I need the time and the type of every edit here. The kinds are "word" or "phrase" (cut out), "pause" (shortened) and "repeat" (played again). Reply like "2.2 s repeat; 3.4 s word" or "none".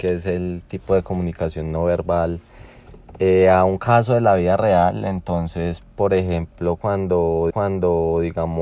7.5 s repeat